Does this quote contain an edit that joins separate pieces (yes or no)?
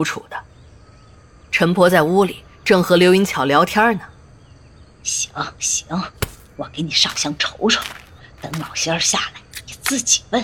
no